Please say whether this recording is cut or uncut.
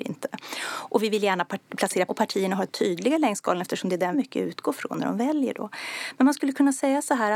cut